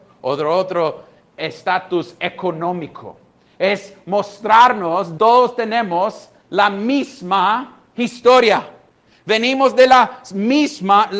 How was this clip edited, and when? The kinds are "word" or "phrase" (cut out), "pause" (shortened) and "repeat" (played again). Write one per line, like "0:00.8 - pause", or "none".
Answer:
0:05.2 - word